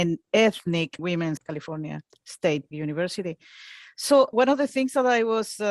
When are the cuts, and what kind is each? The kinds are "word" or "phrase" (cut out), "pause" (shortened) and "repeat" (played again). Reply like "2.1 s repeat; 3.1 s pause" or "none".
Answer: 1.0 s word; 1.4 s word; 2.7 s word; 4.3 s word